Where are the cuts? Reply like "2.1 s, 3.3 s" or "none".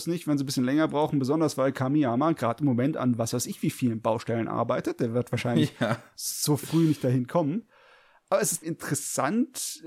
8.6 s